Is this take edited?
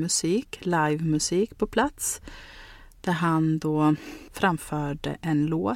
no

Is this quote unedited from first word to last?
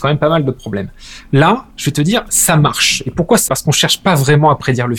no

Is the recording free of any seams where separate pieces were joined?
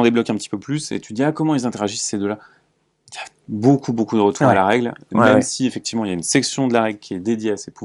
yes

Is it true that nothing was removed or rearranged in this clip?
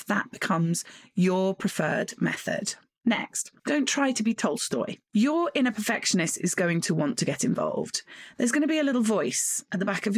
yes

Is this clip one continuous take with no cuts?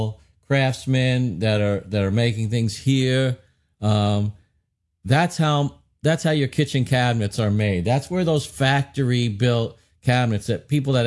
yes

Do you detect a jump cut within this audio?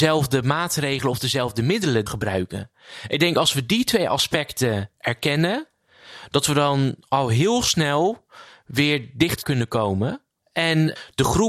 yes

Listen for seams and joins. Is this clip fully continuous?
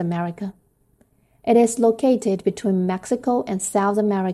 yes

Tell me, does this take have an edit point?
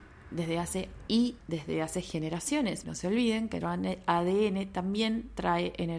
yes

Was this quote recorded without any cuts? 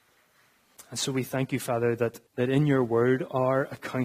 no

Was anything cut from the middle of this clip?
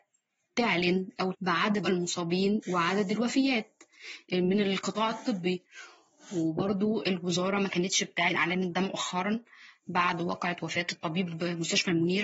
yes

